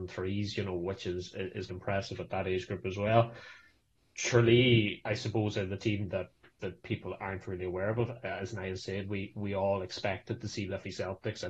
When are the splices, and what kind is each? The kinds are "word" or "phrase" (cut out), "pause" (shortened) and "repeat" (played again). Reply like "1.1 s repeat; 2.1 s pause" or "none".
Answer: 1.7 s word

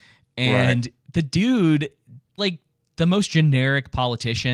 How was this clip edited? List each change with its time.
2.4 s word

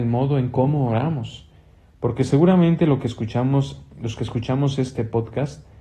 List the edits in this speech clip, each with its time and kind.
none

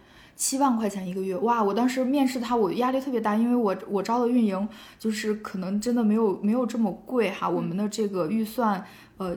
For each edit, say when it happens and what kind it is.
none

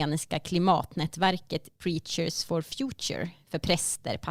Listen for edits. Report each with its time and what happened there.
none

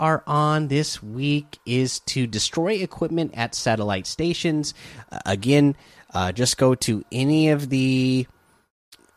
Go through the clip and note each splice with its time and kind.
none

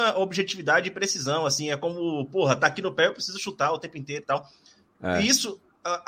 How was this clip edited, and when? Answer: none

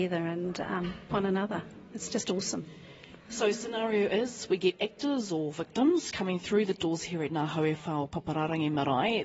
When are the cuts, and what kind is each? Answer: 1.1 s word

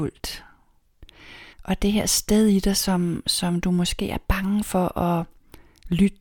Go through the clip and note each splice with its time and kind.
1.5 s pause

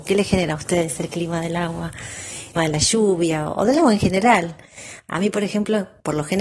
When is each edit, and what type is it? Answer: 2.6 s word

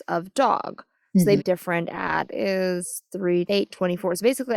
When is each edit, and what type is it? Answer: 1.4 s word; 2.3 s word; 3.5 s word

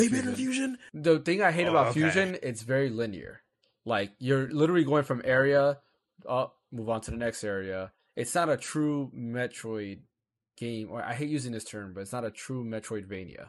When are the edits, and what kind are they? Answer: none

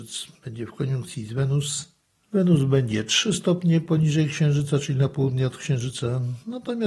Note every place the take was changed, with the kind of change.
none

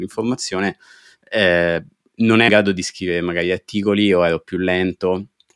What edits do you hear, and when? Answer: 2.5 s word

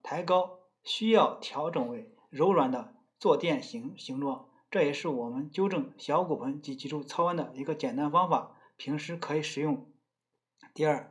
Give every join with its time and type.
none

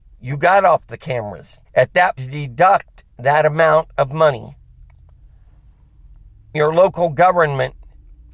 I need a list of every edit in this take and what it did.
1.6 s pause; 2.2 s phrase; 6.5 s word

